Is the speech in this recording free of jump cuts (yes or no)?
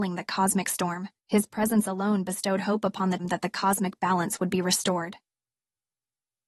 no